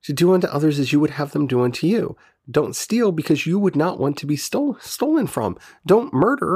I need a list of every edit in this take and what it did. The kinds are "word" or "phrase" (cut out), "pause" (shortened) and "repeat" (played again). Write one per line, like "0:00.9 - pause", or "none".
none